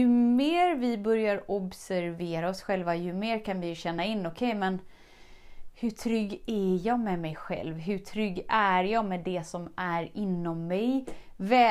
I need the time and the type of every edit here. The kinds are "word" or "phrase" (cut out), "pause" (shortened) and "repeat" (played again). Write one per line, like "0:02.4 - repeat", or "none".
none